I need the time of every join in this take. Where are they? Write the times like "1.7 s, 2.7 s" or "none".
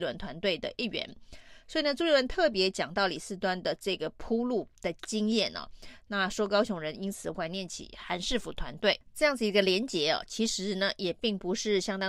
4.8 s